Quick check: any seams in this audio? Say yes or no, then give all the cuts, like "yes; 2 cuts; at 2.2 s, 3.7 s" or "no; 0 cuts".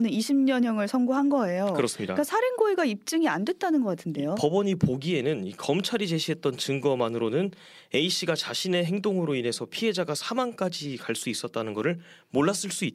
no; 0 cuts